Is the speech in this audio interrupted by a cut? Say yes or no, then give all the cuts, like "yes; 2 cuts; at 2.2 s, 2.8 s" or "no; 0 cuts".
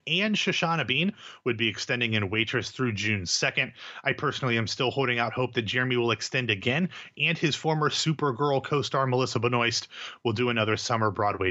no; 0 cuts